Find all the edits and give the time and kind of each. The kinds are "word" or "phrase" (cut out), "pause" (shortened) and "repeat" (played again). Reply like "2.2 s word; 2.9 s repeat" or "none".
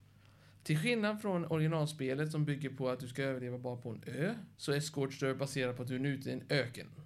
4.5 s pause